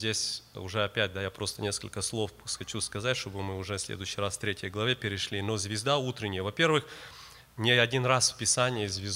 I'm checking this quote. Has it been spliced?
no; 0 cuts

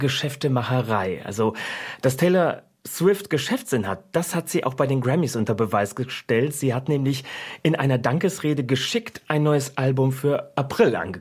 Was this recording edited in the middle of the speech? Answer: no; 0 cuts

